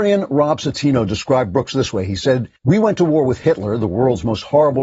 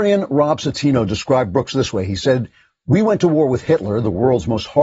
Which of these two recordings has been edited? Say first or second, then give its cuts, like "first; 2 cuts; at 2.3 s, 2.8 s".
first; 1 cut; at 2.6 s